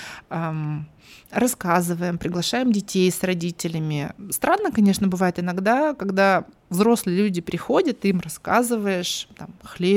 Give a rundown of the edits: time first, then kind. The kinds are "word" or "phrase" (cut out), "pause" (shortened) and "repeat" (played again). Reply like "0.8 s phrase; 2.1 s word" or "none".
none